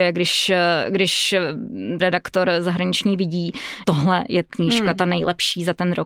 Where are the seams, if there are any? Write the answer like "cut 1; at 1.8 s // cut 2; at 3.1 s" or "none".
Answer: cut 1; at 2.0 s // cut 2; at 3.8 s // cut 3; at 4.5 s